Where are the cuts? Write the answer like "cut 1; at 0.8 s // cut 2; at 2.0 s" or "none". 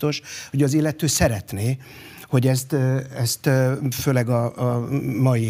none